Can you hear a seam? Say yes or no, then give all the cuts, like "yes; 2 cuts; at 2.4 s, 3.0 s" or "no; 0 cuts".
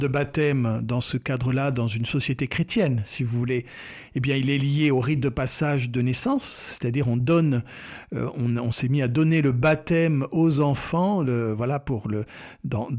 no; 0 cuts